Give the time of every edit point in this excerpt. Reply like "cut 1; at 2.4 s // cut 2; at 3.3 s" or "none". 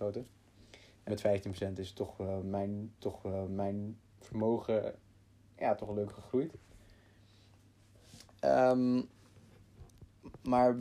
cut 1; at 1.1 s // cut 2; at 3.0 s

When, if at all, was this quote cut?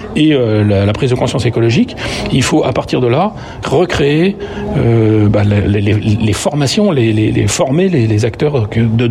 cut 1; at 3.6 s

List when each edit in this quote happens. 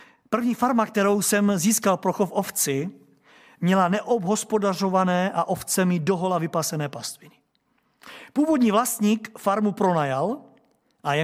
none

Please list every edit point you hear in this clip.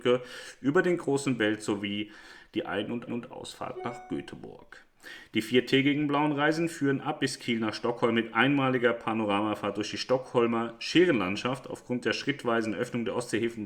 cut 1; at 3.1 s

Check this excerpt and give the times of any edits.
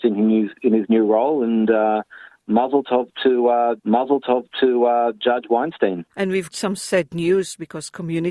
cut 1; at 3.8 s // cut 2; at 6.1 s // cut 3; at 6.5 s

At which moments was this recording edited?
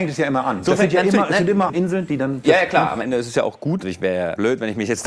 cut 1; at 1.7 s // cut 2; at 2.4 s

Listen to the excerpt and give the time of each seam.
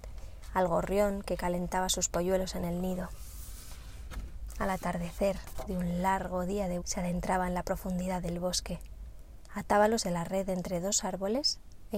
cut 1; at 5.7 s // cut 2; at 6.8 s // cut 3; at 10.0 s

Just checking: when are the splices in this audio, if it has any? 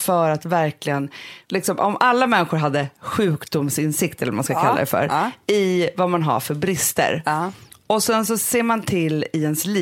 none

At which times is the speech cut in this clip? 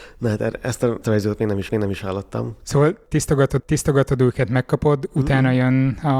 cut 1; at 1.0 s // cut 2; at 1.7 s // cut 3; at 3.6 s

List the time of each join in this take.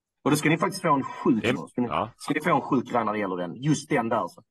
cut 1; at 1.5 s

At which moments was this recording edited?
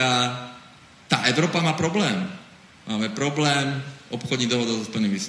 none

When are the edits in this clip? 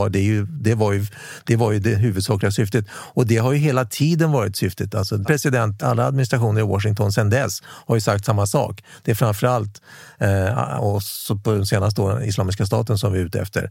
cut 1; at 5.2 s // cut 2; at 5.8 s // cut 3; at 10.8 s

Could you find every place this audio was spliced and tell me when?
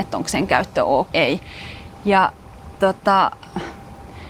cut 1; at 1.1 s // cut 2; at 2.8 s

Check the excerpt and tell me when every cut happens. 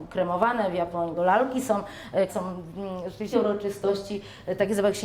cut 1; at 1.2 s // cut 2; at 2.3 s // cut 3; at 3.3 s

